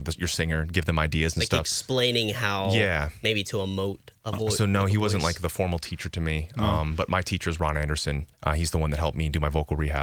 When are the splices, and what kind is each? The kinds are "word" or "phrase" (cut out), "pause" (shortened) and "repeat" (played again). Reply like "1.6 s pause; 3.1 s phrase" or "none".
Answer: 4.2 s pause; 8.3 s pause